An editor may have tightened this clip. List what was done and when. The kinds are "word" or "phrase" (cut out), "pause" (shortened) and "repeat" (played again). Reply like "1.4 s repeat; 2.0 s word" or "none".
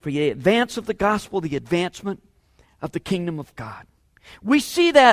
none